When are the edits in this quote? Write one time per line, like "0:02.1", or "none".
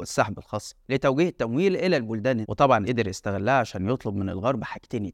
0:02.4
0:02.9